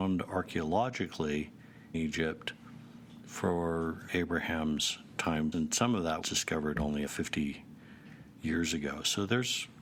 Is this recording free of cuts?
no; 5 cuts; at 1.9 s, 4.1 s, 5.5 s, 6.2 s, 7.1 s

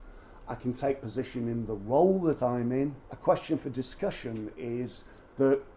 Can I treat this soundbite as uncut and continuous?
no; 2 cuts; at 1.0 s, 3.0 s

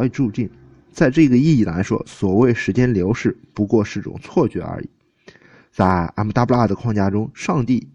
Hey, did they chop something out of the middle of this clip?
no; 0 cuts

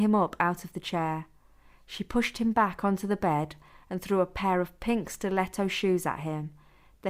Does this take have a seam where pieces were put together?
no; 0 cuts

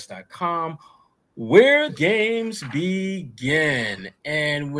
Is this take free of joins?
no; 1 cut; at 1.9 s

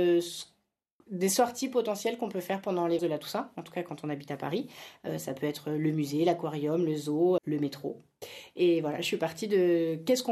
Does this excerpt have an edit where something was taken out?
yes; 2 cuts; at 3.0 s, 7.4 s

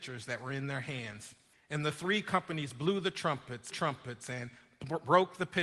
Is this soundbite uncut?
no; 2 cuts; at 1.5 s, 3.7 s

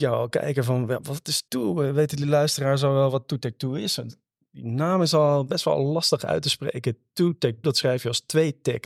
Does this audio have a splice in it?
yes; 2 cuts; at 1.5 s, 7.6 s

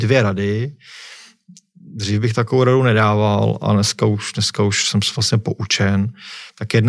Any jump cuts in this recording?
no; 0 cuts

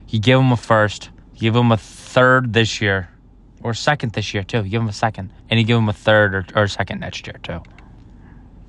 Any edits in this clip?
yes; 3 cuts; at 1.2 s, 3.4 s, 5.4 s

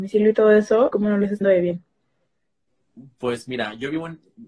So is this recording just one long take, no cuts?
no; 2 cuts; at 0.9 s, 1.4 s

